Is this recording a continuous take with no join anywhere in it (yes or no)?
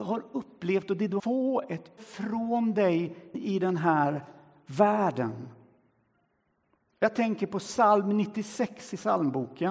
no